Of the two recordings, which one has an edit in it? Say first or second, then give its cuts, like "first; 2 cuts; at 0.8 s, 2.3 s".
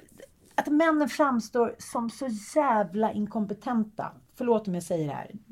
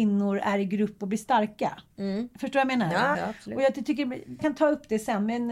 second; 3 cuts; at 1.9 s, 3.1 s, 4.4 s